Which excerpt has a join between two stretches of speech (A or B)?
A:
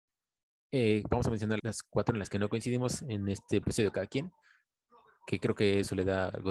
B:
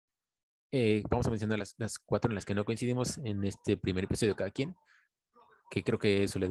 A